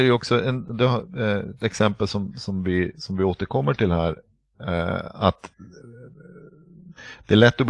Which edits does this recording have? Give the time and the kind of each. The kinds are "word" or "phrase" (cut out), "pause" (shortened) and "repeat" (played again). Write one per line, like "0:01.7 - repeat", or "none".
none